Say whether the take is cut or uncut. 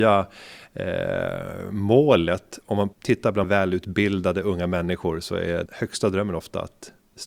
cut